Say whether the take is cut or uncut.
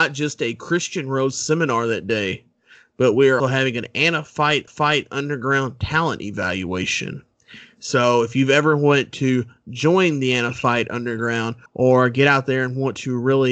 cut